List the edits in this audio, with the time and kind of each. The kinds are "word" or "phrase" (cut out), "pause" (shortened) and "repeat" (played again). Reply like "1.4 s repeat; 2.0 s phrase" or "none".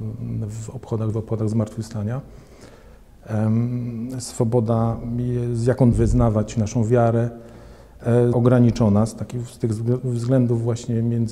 1.1 s word; 5.9 s phrase; 8.3 s word